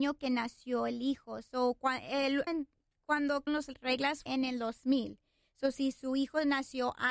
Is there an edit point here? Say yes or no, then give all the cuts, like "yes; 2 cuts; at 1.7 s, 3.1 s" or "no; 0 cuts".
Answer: yes; 3 cuts; at 2.5 s, 3.5 s, 4.3 s